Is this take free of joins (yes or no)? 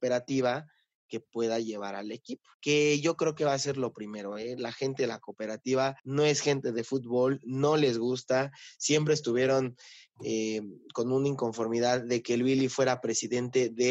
no